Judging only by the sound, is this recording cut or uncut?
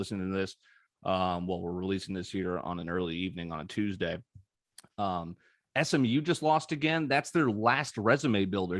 uncut